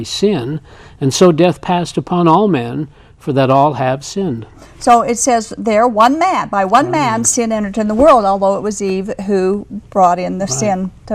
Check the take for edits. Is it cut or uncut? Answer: uncut